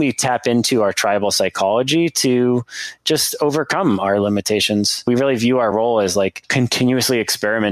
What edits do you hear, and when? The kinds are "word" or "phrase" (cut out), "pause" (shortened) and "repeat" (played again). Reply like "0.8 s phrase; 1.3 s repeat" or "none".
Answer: none